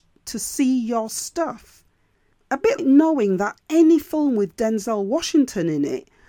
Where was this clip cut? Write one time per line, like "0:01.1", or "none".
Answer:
0:02.8